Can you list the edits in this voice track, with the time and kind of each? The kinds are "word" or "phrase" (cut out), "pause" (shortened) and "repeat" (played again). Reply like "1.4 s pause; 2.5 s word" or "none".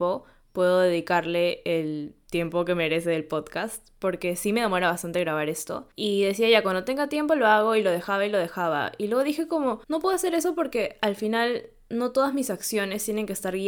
9.8 s pause